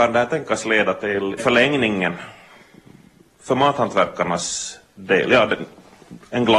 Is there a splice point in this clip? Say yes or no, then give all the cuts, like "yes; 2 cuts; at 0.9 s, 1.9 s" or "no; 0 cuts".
yes; 1 cut; at 1.4 s